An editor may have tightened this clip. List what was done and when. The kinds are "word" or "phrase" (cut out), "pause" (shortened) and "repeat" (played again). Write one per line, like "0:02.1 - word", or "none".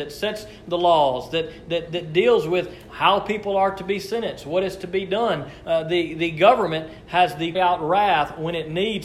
0:01.9 - word
0:07.5 - phrase